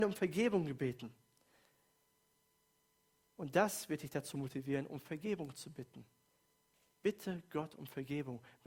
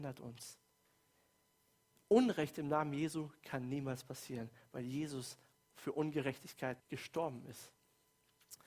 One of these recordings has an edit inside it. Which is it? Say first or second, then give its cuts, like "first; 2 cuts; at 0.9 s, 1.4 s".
second; 1 cut; at 6.8 s